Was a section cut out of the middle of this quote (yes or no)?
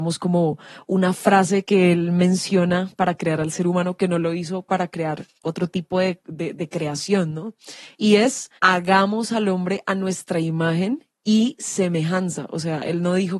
yes